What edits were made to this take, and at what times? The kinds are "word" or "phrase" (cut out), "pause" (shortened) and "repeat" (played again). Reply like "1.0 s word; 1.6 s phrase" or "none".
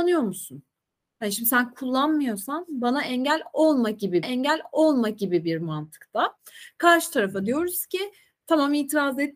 4.2 s repeat